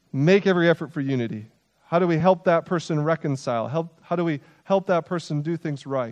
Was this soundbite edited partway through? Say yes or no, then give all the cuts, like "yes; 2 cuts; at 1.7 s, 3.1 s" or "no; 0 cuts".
no; 0 cuts